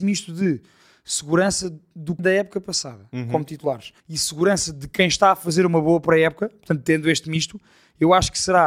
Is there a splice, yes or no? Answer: yes